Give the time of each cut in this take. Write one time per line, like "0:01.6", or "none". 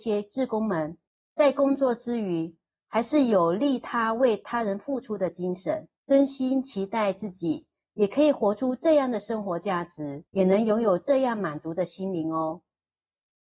0:01.1
0:06.0
0:10.3